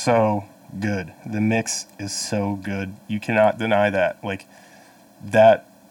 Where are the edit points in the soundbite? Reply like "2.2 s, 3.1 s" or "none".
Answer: none